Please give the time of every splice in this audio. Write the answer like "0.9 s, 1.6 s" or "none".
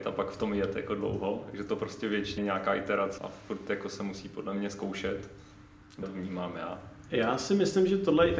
2.4 s, 3.2 s, 6.0 s